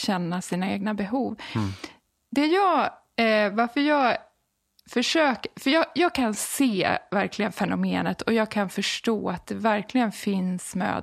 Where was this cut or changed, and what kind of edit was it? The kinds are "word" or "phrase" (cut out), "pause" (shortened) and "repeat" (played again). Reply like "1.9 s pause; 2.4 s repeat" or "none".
none